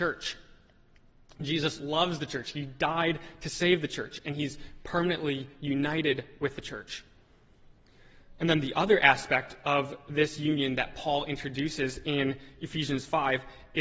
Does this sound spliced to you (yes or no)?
no